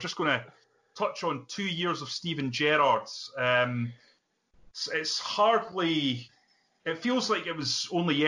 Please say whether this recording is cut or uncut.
uncut